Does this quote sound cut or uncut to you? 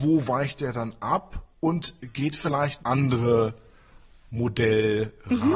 cut